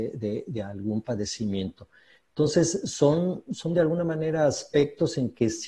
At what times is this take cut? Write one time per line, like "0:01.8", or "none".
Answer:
none